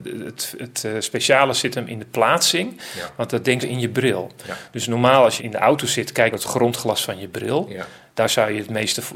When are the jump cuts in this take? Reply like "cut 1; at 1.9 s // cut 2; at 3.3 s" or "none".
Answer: cut 1; at 3.6 s // cut 2; at 5.4 s // cut 3; at 6.3 s